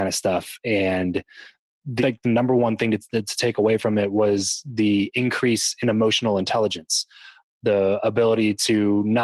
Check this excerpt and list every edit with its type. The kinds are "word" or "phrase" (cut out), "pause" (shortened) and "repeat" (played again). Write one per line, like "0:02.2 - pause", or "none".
0:02.0 - phrase